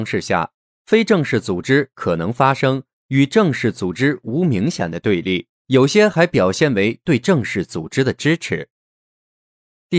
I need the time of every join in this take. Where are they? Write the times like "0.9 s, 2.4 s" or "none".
5.5 s

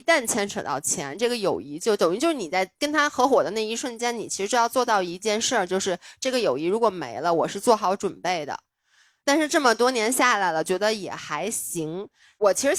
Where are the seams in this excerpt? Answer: none

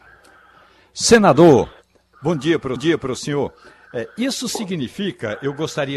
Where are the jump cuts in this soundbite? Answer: 2.8 s

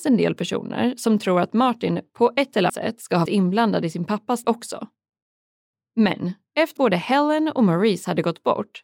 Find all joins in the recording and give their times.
2.7 s, 3.3 s, 4.4 s, 6.8 s

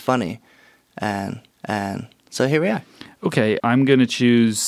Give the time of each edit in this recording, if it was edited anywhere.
1.5 s, 3.6 s

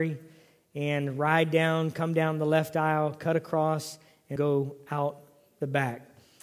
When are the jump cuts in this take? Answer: 4.4 s

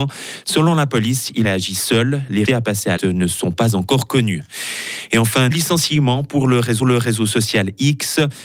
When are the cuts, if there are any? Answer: 1.4 s, 2.5 s, 3.0 s, 5.5 s, 6.8 s

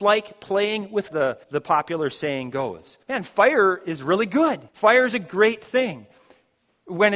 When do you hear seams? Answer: 1.1 s, 1.4 s, 3.0 s, 4.7 s

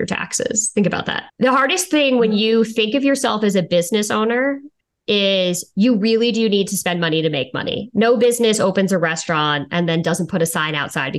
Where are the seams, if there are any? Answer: 1.3 s, 4.8 s

